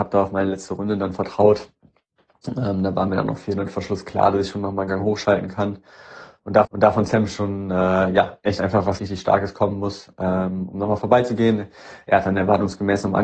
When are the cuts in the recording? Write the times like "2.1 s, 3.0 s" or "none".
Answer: 6.6 s, 9.0 s